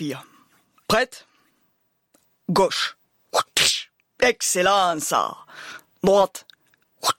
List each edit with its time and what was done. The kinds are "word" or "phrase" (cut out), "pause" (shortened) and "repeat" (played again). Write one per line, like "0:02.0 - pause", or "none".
none